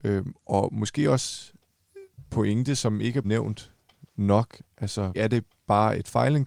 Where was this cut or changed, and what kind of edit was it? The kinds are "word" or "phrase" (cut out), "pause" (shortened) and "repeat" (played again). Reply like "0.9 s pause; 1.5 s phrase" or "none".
2.3 s word; 3.2 s word; 5.1 s word